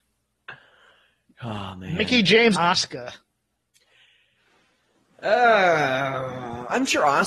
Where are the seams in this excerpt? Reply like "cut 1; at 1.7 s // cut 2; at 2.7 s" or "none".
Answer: cut 1; at 2.5 s